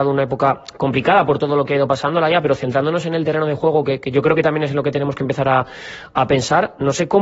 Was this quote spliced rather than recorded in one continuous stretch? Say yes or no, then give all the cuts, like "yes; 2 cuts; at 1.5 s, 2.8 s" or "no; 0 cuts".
no; 0 cuts